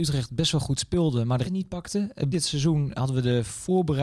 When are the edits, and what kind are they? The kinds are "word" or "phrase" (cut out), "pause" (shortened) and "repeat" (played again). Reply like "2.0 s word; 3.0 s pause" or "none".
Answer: 1.4 s word; 2.3 s word